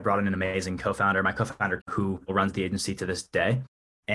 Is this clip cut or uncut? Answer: cut